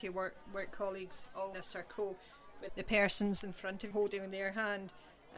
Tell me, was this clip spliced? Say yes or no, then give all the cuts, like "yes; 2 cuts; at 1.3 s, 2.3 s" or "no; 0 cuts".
yes; 4 cuts; at 1.5 s, 2.7 s, 3.4 s, 3.9 s